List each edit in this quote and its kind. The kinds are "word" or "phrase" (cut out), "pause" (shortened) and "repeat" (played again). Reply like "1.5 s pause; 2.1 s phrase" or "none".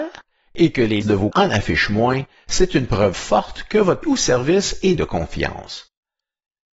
1.0 s word; 1.3 s word; 3.1 s word; 4.0 s word; 5.0 s word